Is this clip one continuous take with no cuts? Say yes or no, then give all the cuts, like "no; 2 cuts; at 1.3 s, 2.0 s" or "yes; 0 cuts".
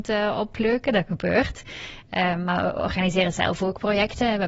yes; 0 cuts